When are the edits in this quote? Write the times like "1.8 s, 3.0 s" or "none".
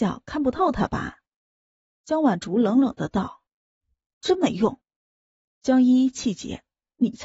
1.3 s, 3.5 s, 4.8 s